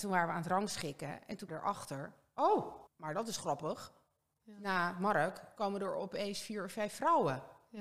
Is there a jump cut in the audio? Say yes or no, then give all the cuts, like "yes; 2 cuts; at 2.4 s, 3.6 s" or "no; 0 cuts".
yes; 2 cuts; at 1.5 s, 2.9 s